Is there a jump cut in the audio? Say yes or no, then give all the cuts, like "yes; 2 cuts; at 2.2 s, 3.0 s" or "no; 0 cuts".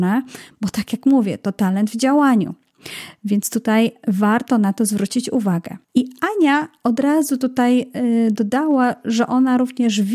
yes; 1 cut; at 5.8 s